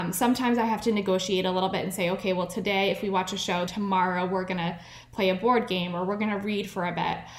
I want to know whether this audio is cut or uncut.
cut